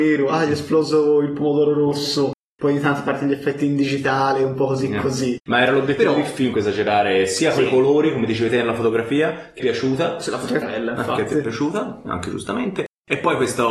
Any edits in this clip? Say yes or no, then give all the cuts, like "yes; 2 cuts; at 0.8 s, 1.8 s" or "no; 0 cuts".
yes; 6 cuts; at 2.4 s, 5.4 s, 6.5 s, 9.6 s, 10.6 s, 12.0 s